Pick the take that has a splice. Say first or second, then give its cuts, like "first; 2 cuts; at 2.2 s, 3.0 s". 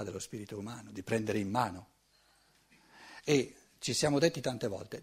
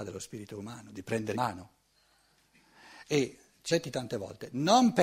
second; 2 cuts; at 1.3 s, 3.7 s